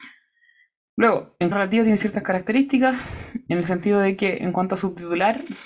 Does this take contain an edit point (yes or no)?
yes